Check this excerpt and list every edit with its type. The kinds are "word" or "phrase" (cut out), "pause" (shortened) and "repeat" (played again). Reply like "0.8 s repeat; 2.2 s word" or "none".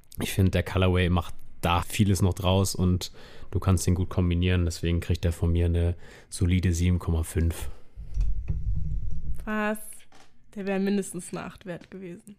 1.8 s word